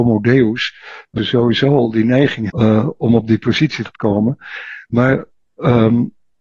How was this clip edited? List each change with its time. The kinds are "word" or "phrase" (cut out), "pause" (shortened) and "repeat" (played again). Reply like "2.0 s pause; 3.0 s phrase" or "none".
1.2 s word; 2.5 s word; 3.9 s word